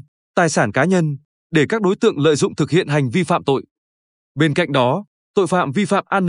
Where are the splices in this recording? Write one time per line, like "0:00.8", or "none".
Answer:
none